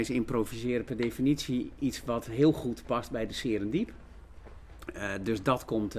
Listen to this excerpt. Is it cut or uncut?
uncut